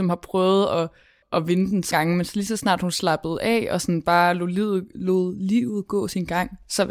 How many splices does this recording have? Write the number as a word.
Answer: three